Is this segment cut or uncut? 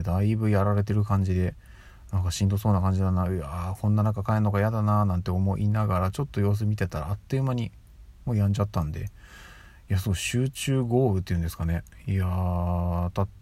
uncut